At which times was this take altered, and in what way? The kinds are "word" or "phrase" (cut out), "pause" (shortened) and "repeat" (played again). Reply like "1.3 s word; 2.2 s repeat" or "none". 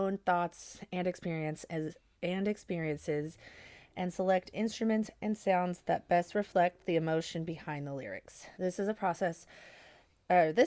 2.1 s pause; 8.5 s pause